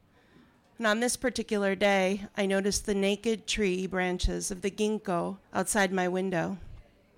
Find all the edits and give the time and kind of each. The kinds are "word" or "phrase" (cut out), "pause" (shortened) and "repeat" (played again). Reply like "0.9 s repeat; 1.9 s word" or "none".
5.4 s pause